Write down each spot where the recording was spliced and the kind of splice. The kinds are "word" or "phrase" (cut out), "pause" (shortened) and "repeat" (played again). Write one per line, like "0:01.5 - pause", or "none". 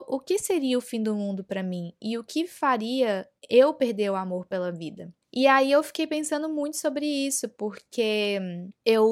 0:03.4 - pause
0:05.2 - pause